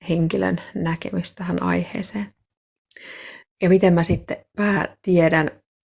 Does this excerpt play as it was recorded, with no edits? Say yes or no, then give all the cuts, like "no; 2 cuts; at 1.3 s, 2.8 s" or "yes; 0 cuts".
yes; 0 cuts